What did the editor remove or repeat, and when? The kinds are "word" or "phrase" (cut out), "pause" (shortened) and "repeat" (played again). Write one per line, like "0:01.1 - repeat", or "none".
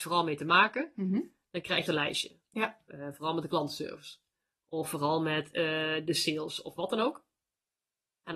0:01.9 - phrase